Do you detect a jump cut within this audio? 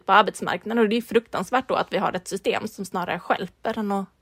no; 0 cuts

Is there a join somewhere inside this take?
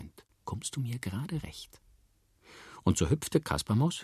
no; 0 cuts

